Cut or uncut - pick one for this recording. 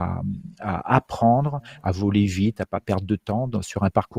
uncut